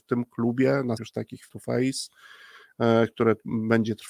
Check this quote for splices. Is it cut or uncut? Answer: cut